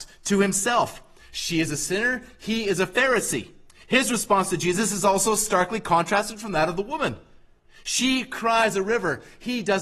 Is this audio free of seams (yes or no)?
no